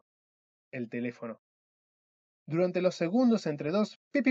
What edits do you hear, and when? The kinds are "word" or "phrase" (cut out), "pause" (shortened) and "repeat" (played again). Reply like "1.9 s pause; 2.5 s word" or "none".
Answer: none